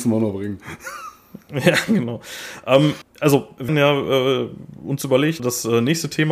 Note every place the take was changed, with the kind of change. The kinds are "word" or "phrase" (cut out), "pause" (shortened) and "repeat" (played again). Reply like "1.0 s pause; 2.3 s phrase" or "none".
3.0 s word; 3.7 s word; 5.4 s word